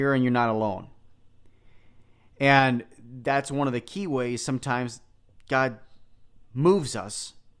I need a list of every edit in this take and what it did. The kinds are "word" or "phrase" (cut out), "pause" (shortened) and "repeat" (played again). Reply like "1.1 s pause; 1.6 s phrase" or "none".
none